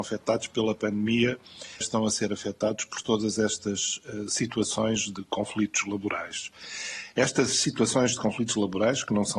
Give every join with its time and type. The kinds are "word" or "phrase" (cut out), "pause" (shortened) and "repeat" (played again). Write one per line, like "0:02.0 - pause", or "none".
0:01.8 - phrase